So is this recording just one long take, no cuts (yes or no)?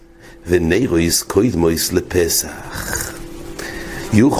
yes